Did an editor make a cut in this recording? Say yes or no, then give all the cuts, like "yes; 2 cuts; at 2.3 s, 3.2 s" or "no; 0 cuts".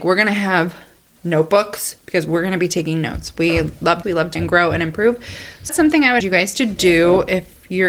yes; 4 cuts; at 4.0 s, 4.4 s, 5.7 s, 6.2 s